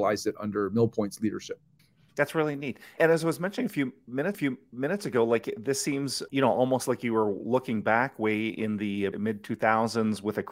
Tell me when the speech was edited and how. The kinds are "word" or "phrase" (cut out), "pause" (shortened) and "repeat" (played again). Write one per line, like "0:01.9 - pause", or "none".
0:01.8 - pause
0:03.0 - word
0:04.3 - repeat
0:06.3 - word
0:09.1 - word